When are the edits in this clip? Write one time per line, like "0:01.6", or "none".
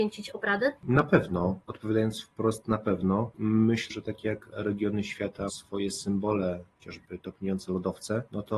0:01.6
0:03.9
0:04.5
0:05.5
0:06.8